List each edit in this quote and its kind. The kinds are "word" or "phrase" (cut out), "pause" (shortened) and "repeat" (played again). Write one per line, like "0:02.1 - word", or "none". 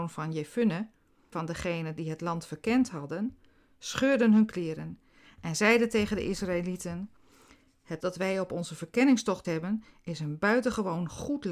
0:01.3 - word
0:08.0 - word
0:09.4 - word